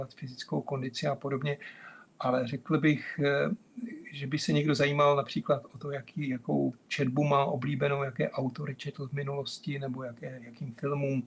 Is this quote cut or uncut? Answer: uncut